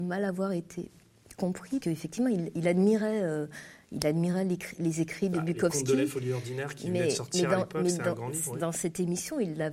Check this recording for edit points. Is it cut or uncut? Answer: cut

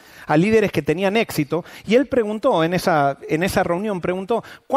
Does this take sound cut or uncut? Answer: uncut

